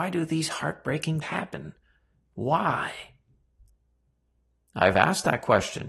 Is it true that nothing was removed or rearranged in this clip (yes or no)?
no